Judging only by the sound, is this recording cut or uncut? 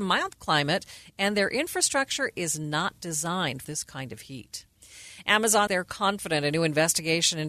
cut